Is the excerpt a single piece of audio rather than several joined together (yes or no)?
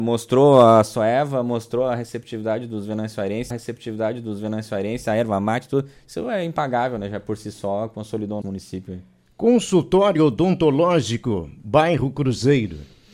no